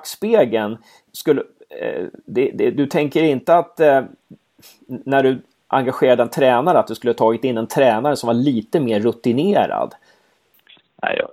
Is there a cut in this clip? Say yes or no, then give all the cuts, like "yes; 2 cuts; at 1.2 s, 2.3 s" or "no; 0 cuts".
yes; 1 cut; at 1.1 s